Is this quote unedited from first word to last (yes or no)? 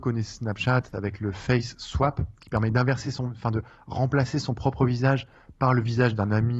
yes